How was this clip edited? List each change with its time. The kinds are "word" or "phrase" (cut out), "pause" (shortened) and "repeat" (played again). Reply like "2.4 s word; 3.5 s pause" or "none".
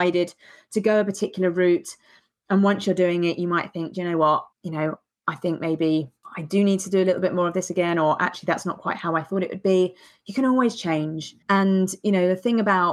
4.5 s pause; 11.4 s pause

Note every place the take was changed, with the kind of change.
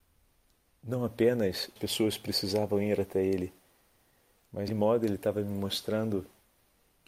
1.8 s word; 4.7 s word

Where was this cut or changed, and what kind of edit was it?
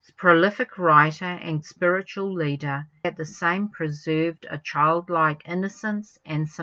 1.6 s word; 3.0 s word; 3.7 s word

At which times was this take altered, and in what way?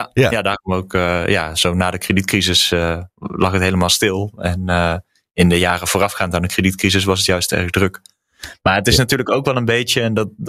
none

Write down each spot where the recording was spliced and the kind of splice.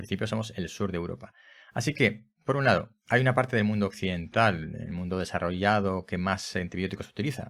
none

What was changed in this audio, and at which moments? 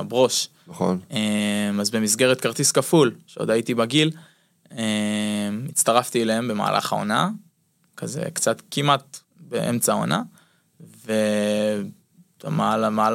none

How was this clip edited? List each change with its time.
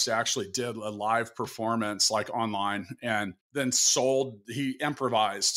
3.4 s pause

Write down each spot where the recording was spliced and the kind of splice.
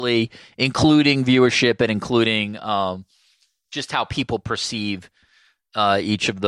none

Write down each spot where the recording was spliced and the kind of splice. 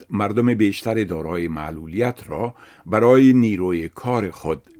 none

